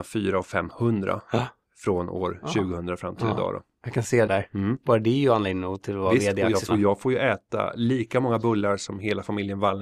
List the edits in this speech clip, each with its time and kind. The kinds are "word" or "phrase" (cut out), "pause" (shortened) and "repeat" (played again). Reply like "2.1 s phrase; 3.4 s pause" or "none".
4.3 s phrase; 6.7 s word